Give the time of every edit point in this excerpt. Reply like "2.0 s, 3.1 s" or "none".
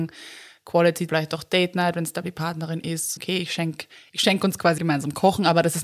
1.1 s, 2.2 s, 3.2 s, 4.8 s

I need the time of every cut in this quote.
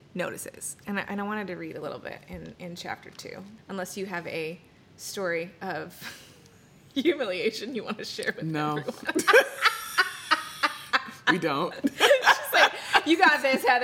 none

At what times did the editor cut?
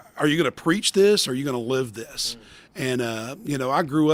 none

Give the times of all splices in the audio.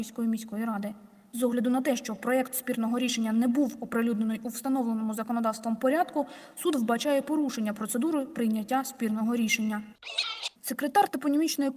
none

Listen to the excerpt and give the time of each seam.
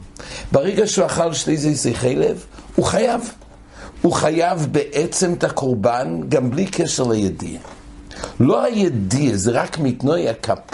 none

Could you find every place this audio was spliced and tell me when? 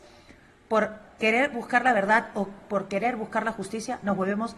none

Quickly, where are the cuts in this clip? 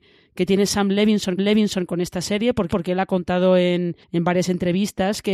1.4 s, 2.7 s, 4.0 s

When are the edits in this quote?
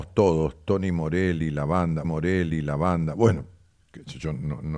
2.0 s

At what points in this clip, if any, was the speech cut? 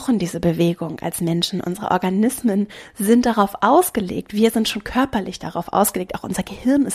none

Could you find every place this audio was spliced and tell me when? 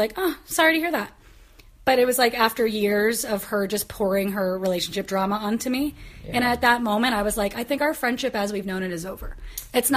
none

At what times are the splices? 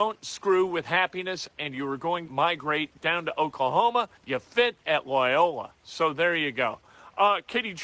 2.3 s, 4.2 s, 5.8 s

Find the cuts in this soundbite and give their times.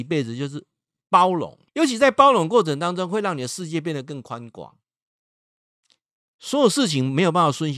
1.7 s

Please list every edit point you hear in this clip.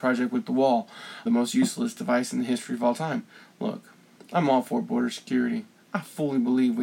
1.3 s

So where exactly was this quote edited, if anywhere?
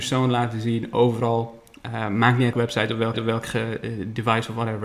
2.5 s, 3.1 s

